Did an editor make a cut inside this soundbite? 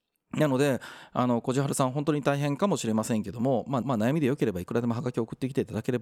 yes; 1 cut; at 3.8 s

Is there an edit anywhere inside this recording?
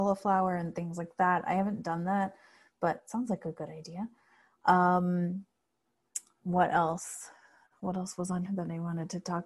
yes; 1 cut; at 8.4 s

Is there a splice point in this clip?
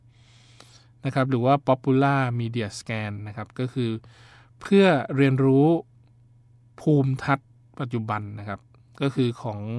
no; 0 cuts

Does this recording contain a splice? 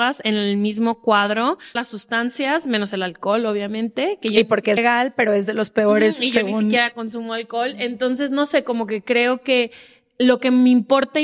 yes; 2 cuts; at 1.8 s, 4.8 s

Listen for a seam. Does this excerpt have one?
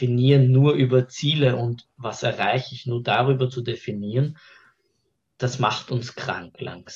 no; 0 cuts

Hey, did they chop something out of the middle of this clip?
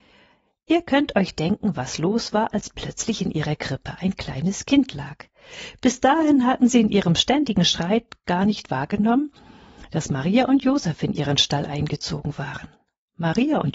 no; 0 cuts

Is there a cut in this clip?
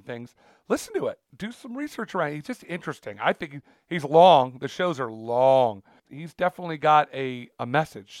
no; 0 cuts

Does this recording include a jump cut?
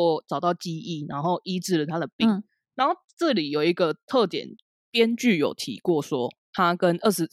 no; 0 cuts

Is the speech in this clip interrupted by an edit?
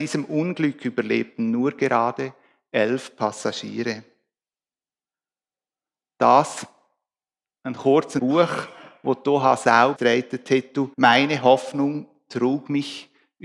yes; 3 cuts; at 8.2 s, 10.0 s, 10.9 s

